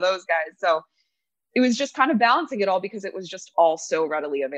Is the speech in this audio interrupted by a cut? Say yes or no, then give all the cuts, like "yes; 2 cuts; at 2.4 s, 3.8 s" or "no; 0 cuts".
no; 0 cuts